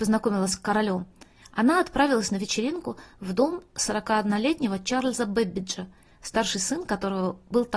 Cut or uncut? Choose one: uncut